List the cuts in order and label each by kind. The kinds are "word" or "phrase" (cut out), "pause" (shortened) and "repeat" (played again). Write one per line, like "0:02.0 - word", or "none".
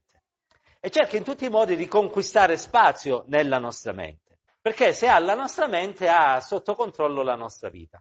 0:04.5 - pause